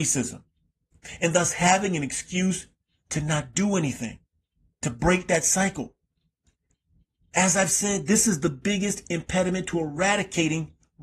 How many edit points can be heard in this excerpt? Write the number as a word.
zero